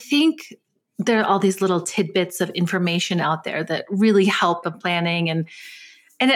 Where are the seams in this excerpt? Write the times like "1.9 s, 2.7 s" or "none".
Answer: 4.6 s